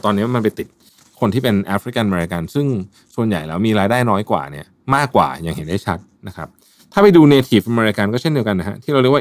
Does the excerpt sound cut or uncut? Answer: uncut